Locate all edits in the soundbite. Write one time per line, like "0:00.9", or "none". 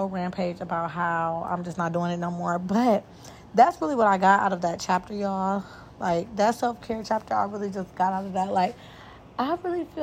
none